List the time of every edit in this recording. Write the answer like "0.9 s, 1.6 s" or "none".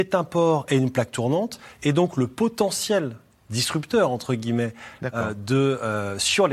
none